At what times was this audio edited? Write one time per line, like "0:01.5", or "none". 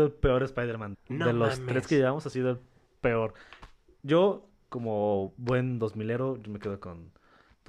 0:00.9